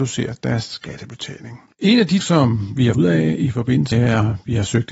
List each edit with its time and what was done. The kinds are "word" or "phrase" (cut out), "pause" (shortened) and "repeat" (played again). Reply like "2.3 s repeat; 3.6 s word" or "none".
2.2 s word; 2.9 s word; 3.9 s word